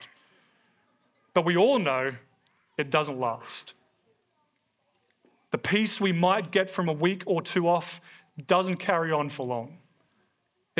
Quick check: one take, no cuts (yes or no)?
yes